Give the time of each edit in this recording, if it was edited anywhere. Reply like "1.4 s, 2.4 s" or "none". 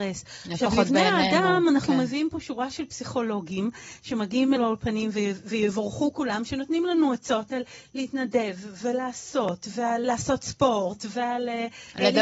4.6 s, 10.0 s